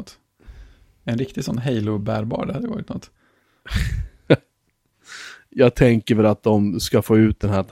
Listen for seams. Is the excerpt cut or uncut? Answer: uncut